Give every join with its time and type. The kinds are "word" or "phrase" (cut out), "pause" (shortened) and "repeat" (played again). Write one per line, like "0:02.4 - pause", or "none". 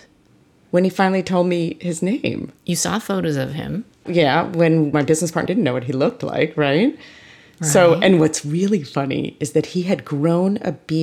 0:02.6 - pause
0:04.9 - word
0:05.5 - phrase